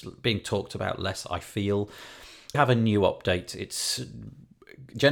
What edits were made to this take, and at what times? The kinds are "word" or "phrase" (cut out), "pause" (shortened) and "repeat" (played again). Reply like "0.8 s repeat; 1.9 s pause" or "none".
2.5 s word